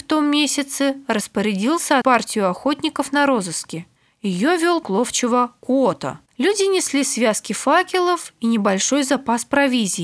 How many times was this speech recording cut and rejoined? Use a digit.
4